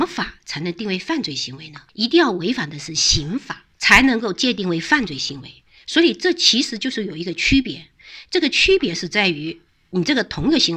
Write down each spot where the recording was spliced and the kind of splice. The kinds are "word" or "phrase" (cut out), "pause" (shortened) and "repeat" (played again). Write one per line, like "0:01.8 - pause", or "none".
0:01.9 - pause
0:03.7 - pause
0:09.7 - pause